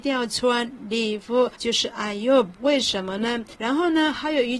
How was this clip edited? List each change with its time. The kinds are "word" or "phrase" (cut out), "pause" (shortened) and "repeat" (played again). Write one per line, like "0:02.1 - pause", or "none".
0:01.5 - pause
0:03.5 - pause